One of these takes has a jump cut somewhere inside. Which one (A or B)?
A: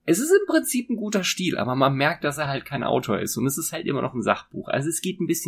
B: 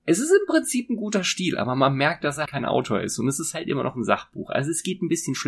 B